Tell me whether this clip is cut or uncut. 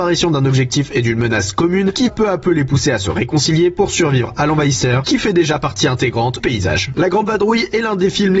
cut